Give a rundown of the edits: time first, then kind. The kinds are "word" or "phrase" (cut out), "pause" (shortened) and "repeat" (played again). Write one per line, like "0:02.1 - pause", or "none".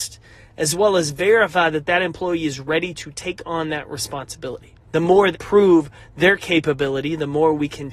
0:04.8 - pause
0:05.3 - word